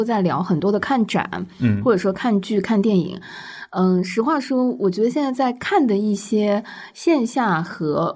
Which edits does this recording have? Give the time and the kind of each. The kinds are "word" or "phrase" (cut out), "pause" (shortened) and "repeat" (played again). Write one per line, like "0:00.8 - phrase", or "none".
none

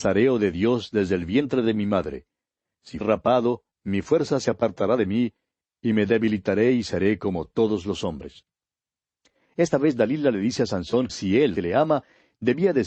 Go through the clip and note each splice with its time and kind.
0:03.0 - word
0:11.1 - word
0:11.6 - word

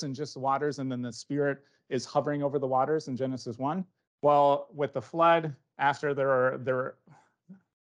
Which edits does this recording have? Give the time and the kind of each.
0:04.1 - pause

